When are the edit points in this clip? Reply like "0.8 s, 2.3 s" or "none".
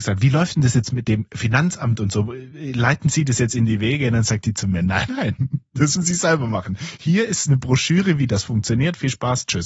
5.1 s, 6.0 s